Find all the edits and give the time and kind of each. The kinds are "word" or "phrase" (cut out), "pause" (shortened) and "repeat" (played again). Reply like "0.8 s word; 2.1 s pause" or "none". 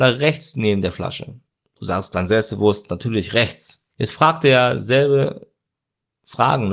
1.6 s pause; 3.9 s pause